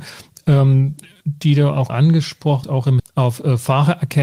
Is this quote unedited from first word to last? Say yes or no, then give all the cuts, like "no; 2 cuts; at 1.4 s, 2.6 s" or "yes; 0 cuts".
no; 3 cuts; at 1.9 s, 2.6 s, 3.0 s